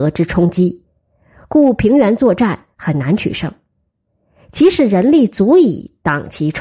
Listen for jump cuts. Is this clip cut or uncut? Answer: uncut